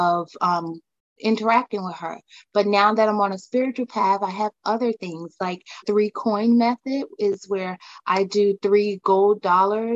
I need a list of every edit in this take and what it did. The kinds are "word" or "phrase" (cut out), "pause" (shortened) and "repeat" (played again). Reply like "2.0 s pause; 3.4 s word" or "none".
5.8 s phrase